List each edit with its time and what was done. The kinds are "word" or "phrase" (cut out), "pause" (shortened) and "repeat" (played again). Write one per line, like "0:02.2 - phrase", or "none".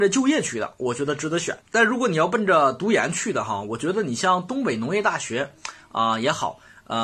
0:01.6 - pause